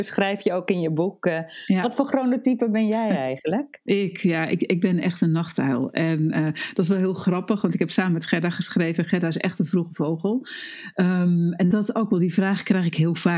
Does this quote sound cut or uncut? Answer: cut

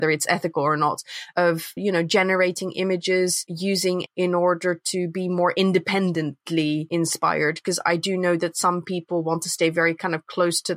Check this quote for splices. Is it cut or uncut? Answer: cut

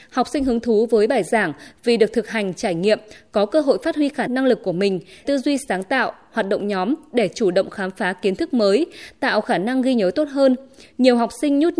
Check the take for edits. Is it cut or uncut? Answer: cut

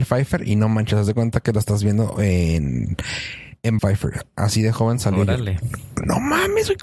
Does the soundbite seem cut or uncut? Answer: cut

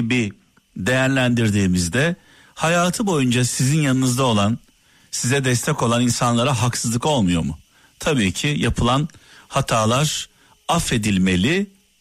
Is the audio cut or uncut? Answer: uncut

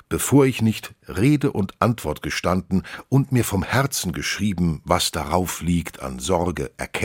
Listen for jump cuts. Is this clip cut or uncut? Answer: uncut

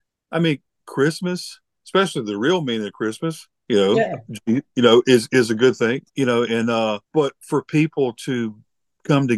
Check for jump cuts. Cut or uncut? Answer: cut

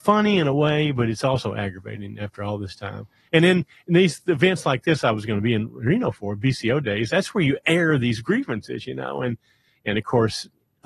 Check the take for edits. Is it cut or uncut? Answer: uncut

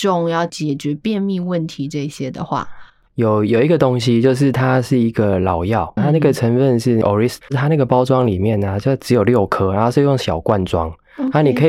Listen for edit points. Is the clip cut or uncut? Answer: cut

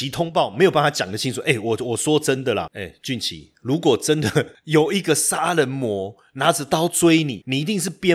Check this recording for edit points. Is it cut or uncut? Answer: uncut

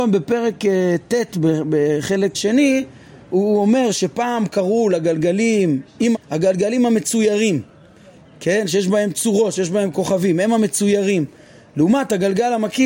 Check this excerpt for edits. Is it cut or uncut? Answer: cut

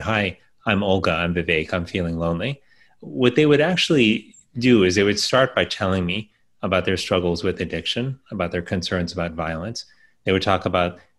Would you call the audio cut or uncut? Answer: uncut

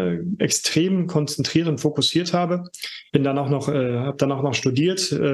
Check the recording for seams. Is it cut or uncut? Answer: cut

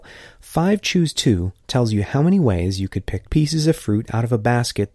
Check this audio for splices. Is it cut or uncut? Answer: cut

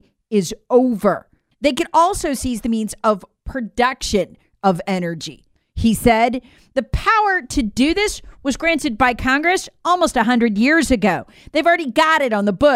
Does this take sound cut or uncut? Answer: uncut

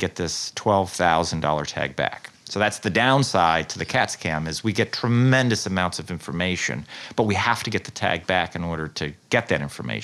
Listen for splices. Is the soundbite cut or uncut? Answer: uncut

